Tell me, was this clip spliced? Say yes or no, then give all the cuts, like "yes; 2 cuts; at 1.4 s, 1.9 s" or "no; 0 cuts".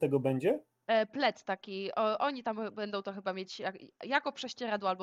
no; 0 cuts